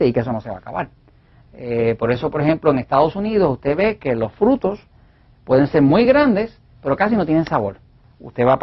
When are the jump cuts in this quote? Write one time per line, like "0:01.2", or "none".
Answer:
none